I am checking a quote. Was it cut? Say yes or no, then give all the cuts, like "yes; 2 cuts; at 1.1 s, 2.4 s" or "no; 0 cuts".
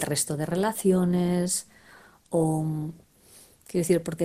no; 0 cuts